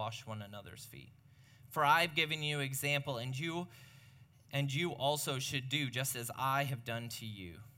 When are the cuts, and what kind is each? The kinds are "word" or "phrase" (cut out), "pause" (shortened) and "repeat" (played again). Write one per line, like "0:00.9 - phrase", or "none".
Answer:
none